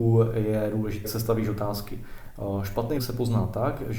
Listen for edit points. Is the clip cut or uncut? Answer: cut